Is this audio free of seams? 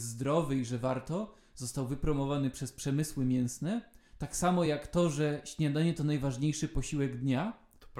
yes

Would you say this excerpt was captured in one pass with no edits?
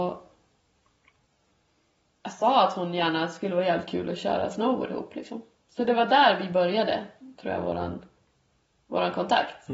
yes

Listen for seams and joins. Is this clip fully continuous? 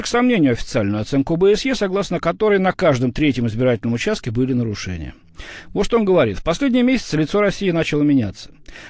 yes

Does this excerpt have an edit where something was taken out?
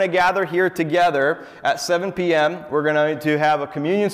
no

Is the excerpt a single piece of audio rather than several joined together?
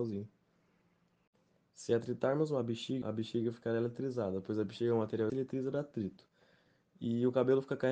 no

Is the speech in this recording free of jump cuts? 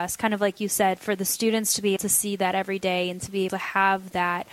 no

